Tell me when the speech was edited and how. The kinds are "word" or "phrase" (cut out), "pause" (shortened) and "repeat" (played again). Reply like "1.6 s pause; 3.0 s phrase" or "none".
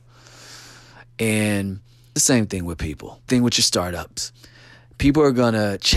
2.2 s word; 3.3 s word